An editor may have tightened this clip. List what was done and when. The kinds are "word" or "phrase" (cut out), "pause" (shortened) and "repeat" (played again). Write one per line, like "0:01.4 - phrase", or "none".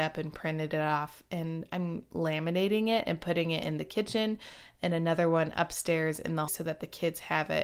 0:06.5 - word